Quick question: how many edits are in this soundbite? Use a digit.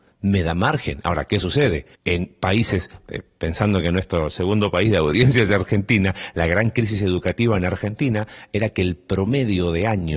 1